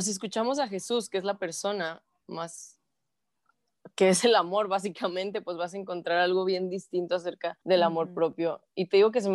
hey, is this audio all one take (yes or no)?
no